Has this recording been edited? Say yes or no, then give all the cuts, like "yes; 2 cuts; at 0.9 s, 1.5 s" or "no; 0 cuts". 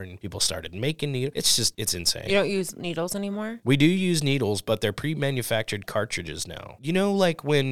no; 0 cuts